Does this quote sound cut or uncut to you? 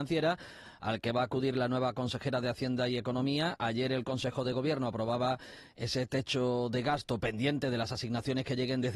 uncut